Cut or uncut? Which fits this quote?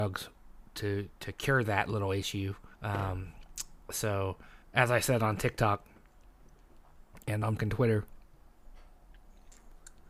cut